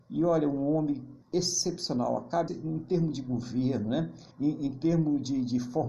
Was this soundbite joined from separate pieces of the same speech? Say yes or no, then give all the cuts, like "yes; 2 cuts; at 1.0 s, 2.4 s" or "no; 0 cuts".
yes; 3 cuts; at 1.2 s, 2.5 s, 4.3 s